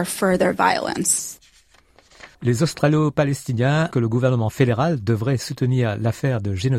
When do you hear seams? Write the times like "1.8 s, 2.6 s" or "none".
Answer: 2.3 s, 3.9 s